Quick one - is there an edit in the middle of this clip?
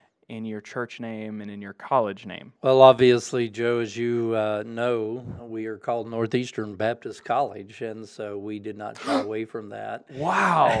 yes; 1 cut; at 2.6 s

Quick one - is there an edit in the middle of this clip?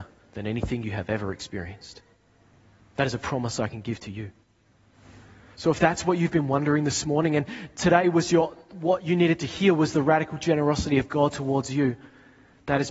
no; 0 cuts

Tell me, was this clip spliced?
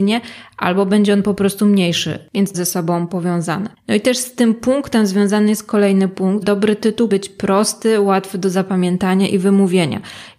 yes; 4 cuts; at 2.5 s, 3.7 s, 6.4 s, 7.1 s

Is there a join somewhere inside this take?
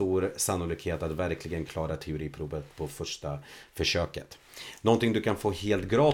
no; 0 cuts

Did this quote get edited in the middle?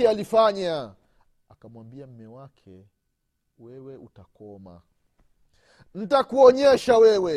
no; 0 cuts

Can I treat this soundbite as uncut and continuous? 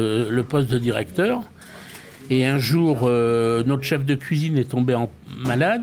yes; 0 cuts

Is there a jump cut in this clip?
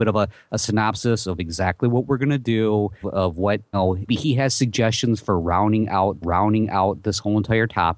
yes; 4 cuts; at 3.0 s, 3.7 s, 4.1 s, 6.2 s

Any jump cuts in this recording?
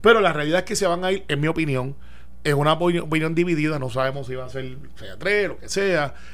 no; 0 cuts

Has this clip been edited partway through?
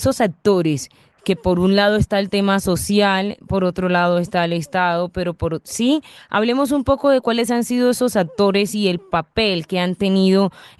no; 0 cuts

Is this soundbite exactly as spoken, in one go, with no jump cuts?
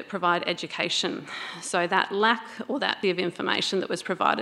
no; 1 cut; at 3.0 s

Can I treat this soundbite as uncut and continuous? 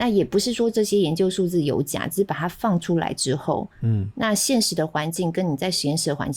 no; 1 cut; at 3.7 s

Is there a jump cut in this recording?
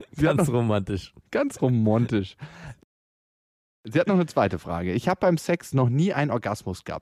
no; 0 cuts

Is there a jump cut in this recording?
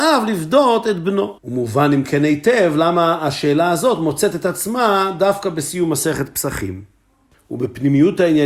yes; 2 cuts; at 1.4 s, 7.3 s

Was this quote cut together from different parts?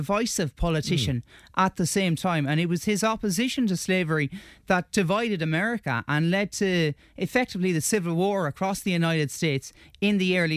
no; 0 cuts

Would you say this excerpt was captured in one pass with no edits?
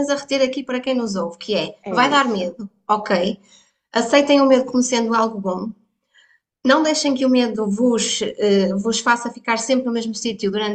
yes; 0 cuts

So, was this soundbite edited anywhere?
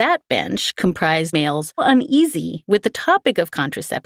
yes; 2 cuts; at 1.3 s, 1.8 s

